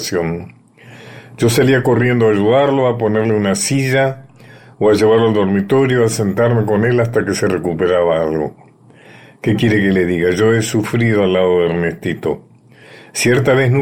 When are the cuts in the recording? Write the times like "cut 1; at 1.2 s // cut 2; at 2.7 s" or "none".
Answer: none